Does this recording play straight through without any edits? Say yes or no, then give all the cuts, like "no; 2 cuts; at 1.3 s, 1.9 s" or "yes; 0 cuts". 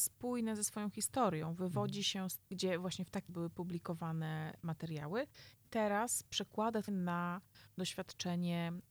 no; 4 cuts; at 2.4 s, 3.3 s, 5.6 s, 6.9 s